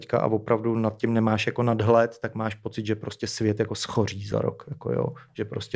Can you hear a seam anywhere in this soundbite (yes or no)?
no